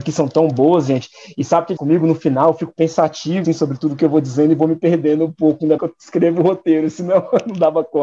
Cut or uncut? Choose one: cut